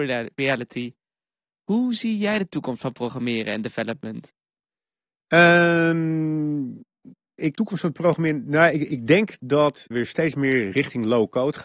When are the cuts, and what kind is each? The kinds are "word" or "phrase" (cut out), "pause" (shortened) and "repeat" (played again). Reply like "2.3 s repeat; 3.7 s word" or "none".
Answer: 7.5 s phrase; 9.9 s word